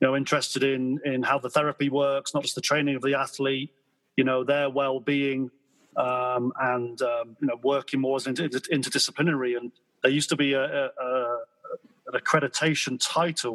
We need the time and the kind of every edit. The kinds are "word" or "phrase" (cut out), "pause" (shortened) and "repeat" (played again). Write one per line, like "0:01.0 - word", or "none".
none